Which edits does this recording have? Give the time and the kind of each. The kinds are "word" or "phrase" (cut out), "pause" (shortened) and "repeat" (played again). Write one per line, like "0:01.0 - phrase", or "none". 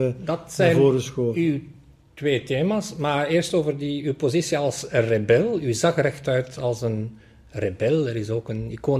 none